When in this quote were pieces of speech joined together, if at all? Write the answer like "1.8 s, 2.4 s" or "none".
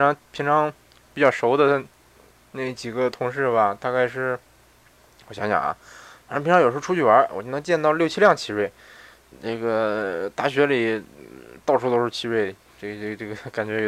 none